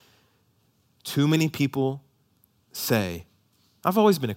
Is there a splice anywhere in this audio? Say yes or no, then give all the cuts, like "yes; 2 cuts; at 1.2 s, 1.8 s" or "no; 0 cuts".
no; 0 cuts